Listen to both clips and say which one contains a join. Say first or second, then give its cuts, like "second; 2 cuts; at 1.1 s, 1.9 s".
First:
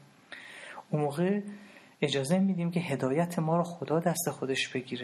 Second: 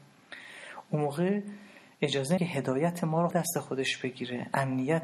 second; 2 cuts; at 2.4 s, 3.3 s